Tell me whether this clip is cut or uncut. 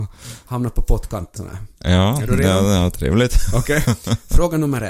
cut